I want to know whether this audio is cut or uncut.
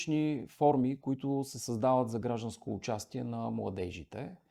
uncut